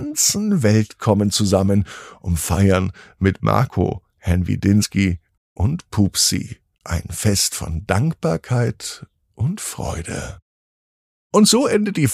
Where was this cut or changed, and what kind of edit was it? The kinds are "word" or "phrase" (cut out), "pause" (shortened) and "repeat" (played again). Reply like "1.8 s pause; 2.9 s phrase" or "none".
none